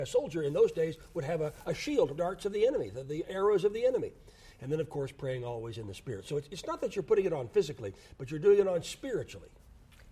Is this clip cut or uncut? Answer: cut